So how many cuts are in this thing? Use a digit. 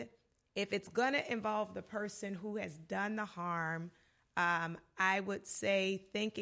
0